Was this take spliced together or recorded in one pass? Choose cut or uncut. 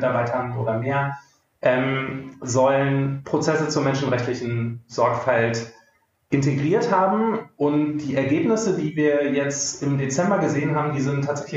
uncut